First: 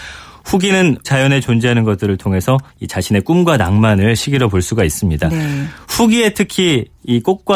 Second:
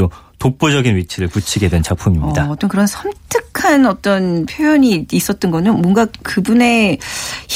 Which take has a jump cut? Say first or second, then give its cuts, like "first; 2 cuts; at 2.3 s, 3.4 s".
first; 3 cuts; at 1.0 s, 2.7 s, 4.2 s